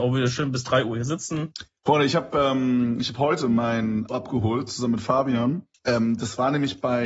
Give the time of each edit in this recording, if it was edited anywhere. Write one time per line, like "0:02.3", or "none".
0:04.1
0:05.7

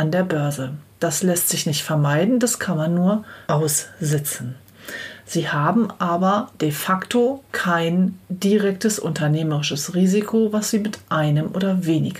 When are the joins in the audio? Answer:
0:03.4
0:07.5

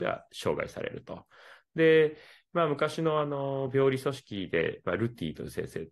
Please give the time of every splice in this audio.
none

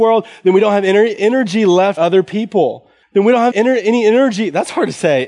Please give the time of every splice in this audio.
0:01.2
0:02.0
0:03.0
0:03.5

